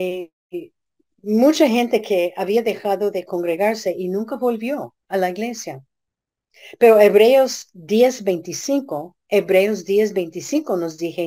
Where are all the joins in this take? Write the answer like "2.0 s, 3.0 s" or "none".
5.0 s, 9.2 s